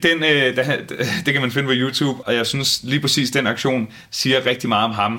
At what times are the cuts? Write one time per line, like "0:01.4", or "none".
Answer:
0:02.2